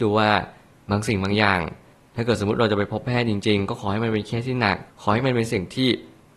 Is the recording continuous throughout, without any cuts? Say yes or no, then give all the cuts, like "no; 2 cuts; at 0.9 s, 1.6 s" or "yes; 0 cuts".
no; 1 cut; at 4.9 s